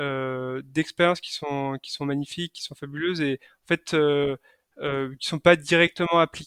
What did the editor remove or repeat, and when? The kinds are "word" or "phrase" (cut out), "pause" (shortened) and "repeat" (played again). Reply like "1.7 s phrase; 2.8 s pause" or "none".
none

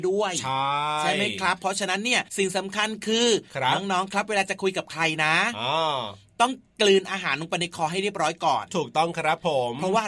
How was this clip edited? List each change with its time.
2.3 s pause

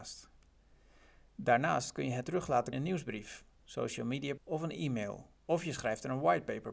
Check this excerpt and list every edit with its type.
2.2 s word; 2.7 s word; 3.5 s pause; 4.4 s word; 5.3 s pause

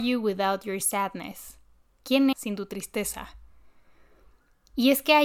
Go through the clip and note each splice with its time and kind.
2.3 s word

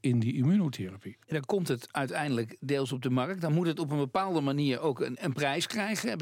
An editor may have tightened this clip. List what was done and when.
1.2 s pause

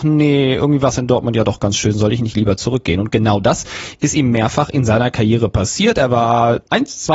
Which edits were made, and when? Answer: none

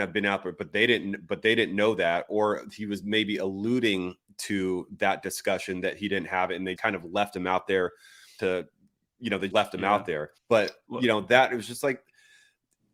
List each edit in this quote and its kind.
6.8 s word; 8.4 s word; 9.5 s word; 10.4 s pause

